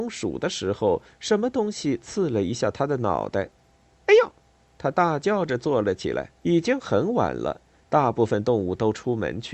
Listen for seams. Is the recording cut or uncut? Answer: cut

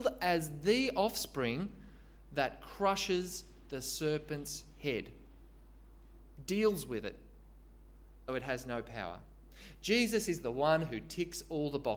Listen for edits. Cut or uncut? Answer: cut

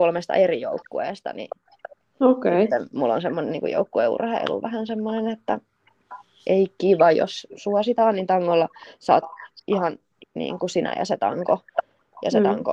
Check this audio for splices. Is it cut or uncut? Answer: uncut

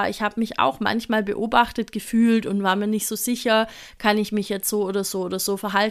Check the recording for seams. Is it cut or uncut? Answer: uncut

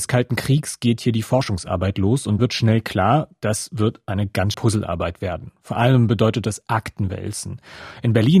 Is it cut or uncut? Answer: cut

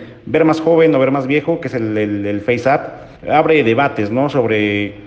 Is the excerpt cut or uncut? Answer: cut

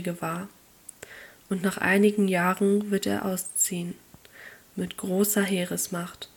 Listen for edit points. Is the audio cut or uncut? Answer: uncut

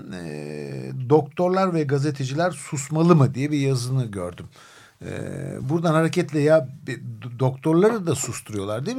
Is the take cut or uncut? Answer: uncut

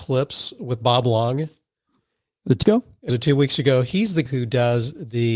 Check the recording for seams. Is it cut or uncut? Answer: cut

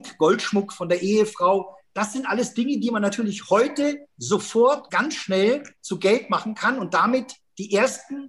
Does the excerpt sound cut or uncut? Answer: cut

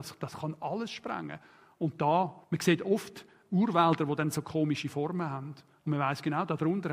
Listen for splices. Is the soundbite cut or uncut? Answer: cut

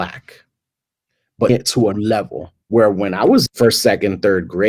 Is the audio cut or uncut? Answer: cut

